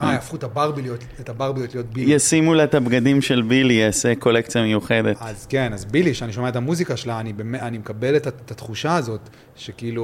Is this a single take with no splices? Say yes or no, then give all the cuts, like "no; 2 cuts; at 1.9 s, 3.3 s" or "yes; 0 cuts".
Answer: yes; 0 cuts